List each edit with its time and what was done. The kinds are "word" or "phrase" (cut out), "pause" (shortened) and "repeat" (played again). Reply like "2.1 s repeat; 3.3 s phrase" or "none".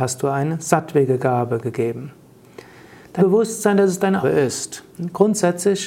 3.2 s word; 4.2 s word; 4.9 s pause